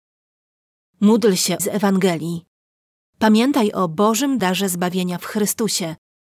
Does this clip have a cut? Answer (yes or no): yes